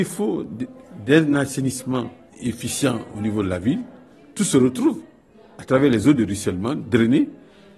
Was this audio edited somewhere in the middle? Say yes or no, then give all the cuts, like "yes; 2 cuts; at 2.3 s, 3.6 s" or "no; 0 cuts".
no; 0 cuts